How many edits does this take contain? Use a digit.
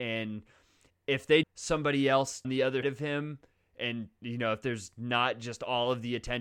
4